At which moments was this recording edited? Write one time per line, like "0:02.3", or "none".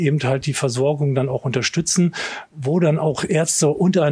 none